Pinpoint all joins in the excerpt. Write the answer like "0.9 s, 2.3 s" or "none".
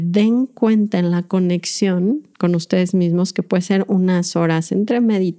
2.3 s